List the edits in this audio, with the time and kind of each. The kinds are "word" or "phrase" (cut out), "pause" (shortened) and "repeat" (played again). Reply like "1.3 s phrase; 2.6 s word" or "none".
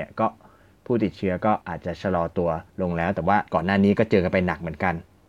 1.6 s pause; 2.7 s pause; 3.5 s pause